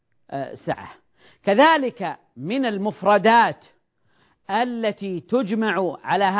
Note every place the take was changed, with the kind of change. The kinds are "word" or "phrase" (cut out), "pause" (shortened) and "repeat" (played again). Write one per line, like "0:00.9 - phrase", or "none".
none